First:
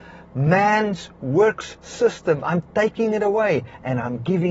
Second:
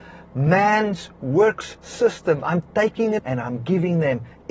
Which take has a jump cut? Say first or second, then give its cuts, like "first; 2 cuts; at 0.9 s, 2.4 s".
second; 1 cut; at 3.2 s